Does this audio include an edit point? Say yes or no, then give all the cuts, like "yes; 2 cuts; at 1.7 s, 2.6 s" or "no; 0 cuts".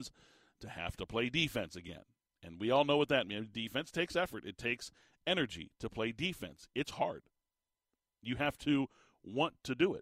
yes; 1 cut; at 2.3 s